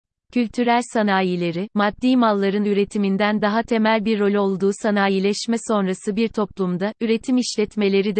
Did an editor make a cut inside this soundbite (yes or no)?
no